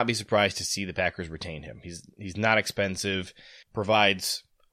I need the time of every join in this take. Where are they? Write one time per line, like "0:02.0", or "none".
0:03.6